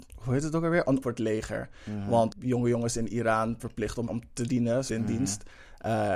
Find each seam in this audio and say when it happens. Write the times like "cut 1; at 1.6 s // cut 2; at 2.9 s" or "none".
cut 1; at 1.0 s // cut 2; at 2.3 s // cut 3; at 3.6 s // cut 4; at 4.1 s // cut 5; at 4.9 s